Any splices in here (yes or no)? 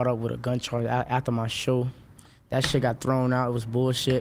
no